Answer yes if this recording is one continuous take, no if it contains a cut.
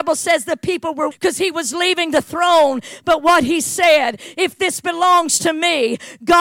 no